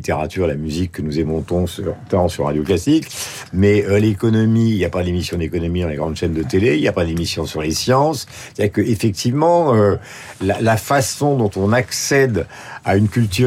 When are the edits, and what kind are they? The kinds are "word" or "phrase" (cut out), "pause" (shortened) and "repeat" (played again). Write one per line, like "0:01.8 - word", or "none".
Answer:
none